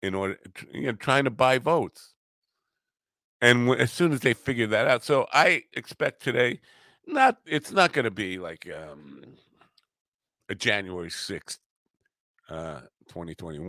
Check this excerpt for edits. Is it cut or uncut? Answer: uncut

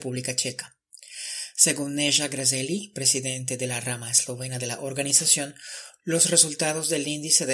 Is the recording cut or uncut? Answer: uncut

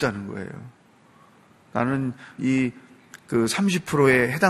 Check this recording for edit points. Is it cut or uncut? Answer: cut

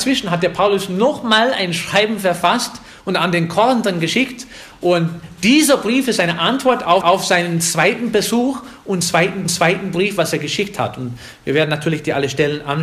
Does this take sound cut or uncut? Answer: cut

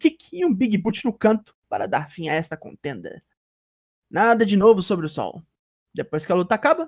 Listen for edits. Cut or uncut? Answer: uncut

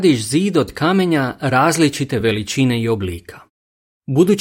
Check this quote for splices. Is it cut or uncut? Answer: uncut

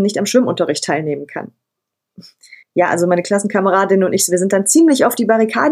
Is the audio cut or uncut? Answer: cut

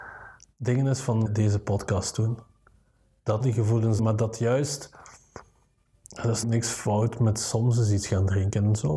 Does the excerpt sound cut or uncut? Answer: cut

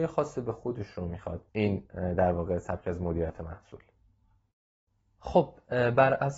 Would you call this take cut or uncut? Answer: cut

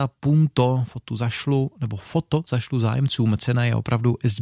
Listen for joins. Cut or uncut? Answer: uncut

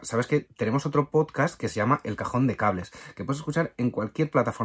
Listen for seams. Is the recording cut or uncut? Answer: uncut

